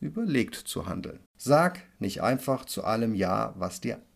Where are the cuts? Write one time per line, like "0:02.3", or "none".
0:01.3

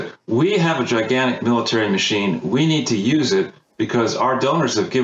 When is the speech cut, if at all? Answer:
none

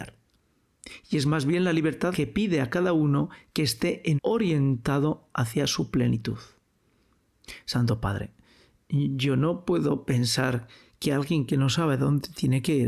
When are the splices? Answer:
0:02.1
0:04.2

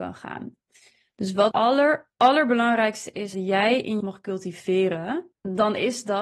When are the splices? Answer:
0:01.5
0:02.1
0:03.3
0:04.0
0:05.3

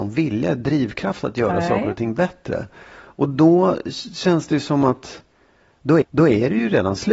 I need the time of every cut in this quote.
0:06.0

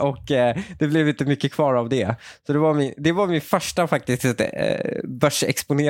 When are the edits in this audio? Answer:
none

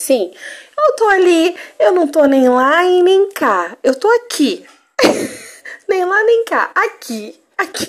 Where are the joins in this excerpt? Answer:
none

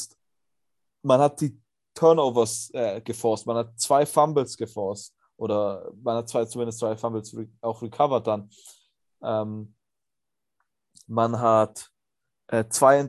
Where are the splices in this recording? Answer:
none

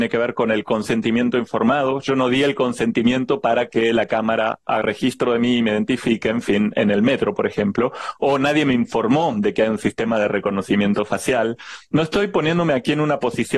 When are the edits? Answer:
0:04.8

